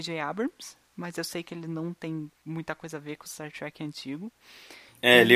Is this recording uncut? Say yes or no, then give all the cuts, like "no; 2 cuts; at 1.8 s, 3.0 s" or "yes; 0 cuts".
yes; 0 cuts